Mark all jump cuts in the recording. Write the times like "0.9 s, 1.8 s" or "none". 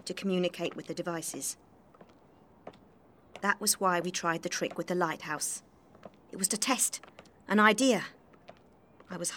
6.5 s